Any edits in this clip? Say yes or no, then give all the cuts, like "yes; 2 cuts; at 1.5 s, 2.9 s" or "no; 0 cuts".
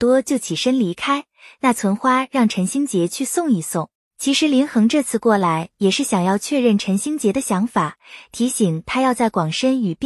yes; 1 cut; at 3.9 s